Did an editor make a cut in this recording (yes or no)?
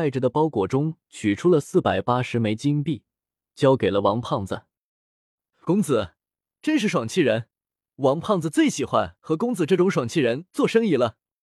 no